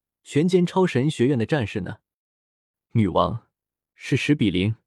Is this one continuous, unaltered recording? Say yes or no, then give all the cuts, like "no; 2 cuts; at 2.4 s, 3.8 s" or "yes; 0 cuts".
yes; 0 cuts